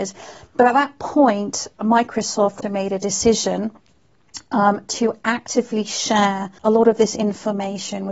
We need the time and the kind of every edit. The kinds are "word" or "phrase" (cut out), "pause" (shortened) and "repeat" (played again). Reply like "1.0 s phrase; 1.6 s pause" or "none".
2.6 s word; 6.6 s pause